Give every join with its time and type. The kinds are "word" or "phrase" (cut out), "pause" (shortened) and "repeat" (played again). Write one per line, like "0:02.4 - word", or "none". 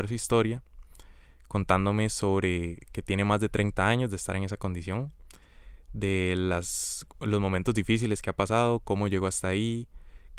none